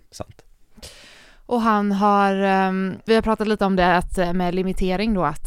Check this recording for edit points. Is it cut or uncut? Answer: cut